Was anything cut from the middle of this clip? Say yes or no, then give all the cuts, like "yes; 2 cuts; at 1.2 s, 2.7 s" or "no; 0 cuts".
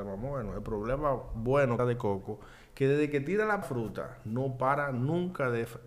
yes; 2 cuts; at 1.8 s, 3.6 s